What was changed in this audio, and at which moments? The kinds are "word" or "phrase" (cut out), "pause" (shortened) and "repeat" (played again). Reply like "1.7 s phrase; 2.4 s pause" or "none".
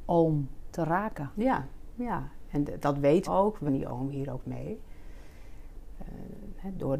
3.3 s word; 3.7 s word